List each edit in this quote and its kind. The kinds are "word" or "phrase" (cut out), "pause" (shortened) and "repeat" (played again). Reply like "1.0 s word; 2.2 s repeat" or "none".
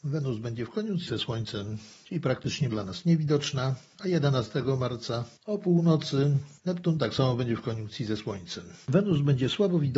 1.1 s word; 2.7 s word

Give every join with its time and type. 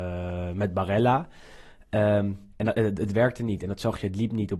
2.5 s pause

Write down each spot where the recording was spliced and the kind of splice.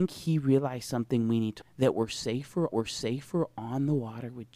1.6 s word; 2.7 s repeat

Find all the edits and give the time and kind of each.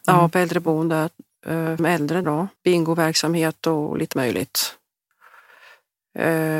1.8 s phrase; 2.2 s word; 2.6 s pause; 4.1 s word

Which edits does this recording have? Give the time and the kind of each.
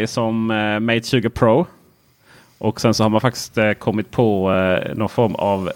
none

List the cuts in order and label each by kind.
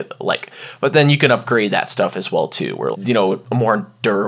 2.9 s word

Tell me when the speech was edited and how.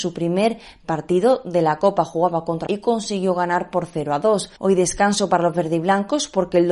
2.7 s phrase

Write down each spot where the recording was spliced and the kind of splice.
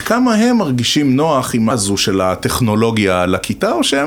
1.7 s word

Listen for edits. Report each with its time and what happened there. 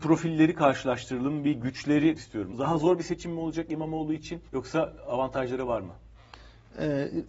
2.2 s word; 4.4 s pause

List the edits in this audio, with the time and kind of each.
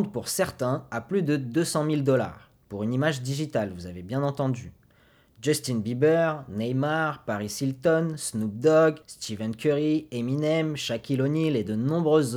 2.6 s pause; 9.0 s pause

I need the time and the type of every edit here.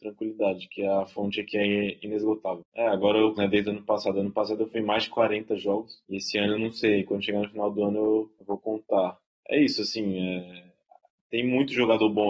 3.4 s phrase; 6.6 s word

